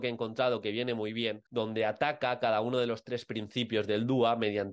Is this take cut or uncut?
cut